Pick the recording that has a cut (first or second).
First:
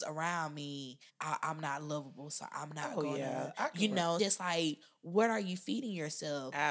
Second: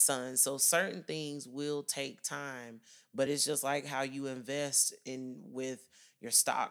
first